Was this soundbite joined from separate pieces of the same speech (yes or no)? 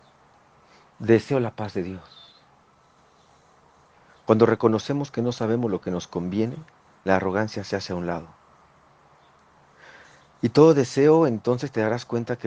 no